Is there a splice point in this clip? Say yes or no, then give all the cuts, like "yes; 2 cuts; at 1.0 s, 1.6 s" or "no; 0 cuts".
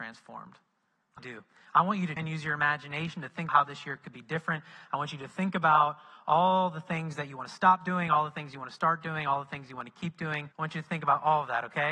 yes; 4 cuts; at 1.2 s, 2.2 s, 3.5 s, 10.5 s